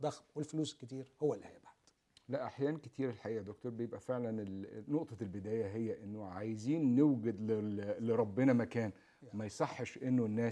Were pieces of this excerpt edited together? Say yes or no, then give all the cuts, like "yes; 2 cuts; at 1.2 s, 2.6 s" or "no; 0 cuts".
no; 0 cuts